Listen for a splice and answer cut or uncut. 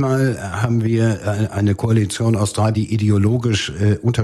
cut